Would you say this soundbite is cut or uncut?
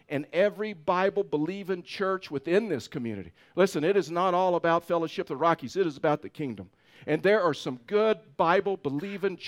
uncut